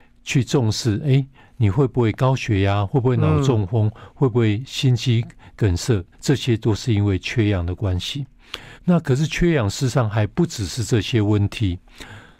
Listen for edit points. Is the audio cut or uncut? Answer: cut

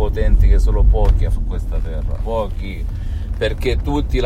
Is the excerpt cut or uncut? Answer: cut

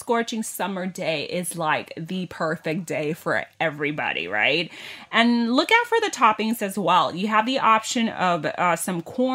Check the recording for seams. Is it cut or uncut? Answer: uncut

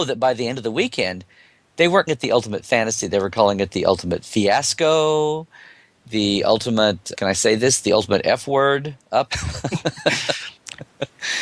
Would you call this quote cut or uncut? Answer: cut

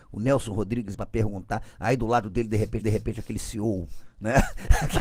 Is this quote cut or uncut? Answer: cut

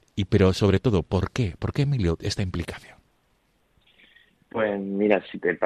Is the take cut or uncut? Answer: uncut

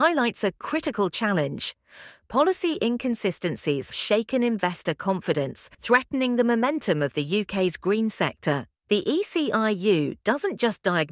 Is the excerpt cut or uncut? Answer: cut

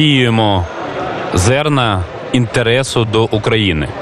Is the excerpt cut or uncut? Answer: uncut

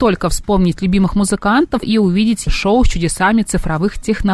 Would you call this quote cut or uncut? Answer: cut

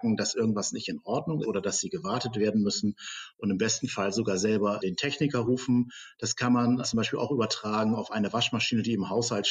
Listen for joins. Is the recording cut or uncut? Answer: cut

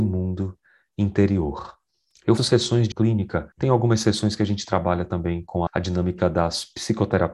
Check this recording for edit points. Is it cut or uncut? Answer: cut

